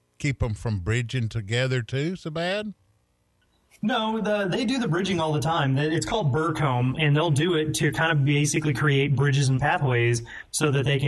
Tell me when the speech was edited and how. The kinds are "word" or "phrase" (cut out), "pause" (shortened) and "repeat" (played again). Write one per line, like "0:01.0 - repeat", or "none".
none